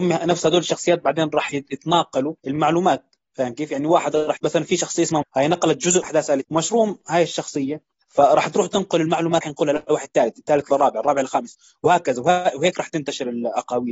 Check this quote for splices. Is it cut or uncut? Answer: cut